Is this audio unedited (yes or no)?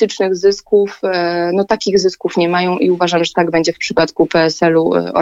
yes